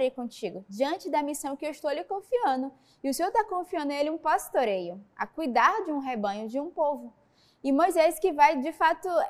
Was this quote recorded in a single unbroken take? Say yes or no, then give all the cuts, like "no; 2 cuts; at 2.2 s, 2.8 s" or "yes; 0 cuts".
yes; 0 cuts